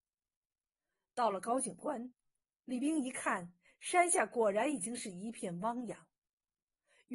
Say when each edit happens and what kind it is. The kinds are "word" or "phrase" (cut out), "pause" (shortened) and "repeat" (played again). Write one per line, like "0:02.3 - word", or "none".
none